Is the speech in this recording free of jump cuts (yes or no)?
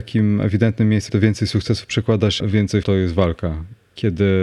no